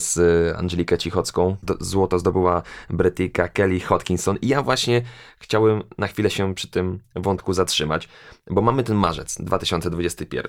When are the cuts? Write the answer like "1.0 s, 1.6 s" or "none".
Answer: none

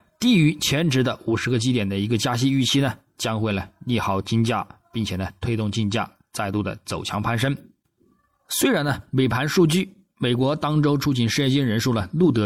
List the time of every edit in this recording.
none

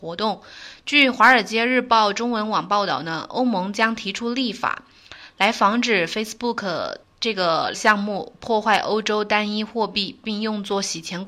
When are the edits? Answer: 7.0 s, 7.7 s

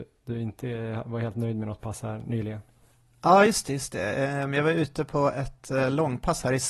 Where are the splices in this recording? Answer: none

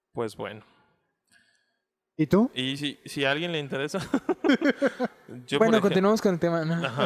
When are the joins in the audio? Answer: none

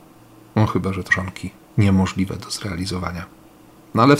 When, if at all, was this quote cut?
1.1 s

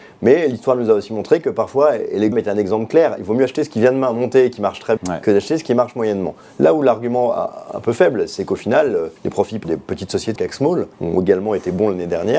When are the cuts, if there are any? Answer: 2.3 s, 5.0 s, 9.2 s, 9.6 s, 10.4 s, 10.9 s

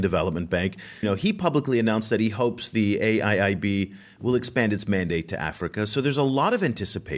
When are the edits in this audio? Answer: 1.0 s

